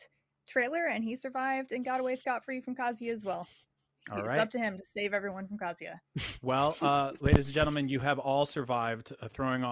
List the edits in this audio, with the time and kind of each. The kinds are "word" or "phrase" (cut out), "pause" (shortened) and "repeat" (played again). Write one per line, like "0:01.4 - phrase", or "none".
none